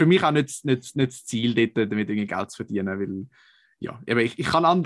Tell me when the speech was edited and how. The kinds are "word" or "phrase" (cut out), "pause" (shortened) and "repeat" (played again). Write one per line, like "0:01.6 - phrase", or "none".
none